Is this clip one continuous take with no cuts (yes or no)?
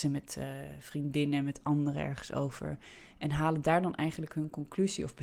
yes